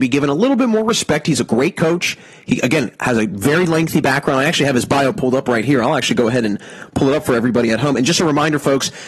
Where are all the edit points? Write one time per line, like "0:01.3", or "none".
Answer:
none